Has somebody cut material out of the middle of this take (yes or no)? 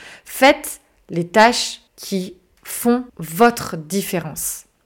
yes